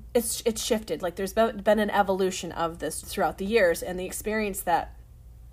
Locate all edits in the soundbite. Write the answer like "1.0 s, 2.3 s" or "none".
3.0 s